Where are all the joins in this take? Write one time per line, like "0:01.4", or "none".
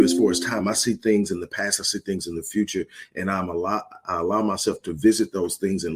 0:04.0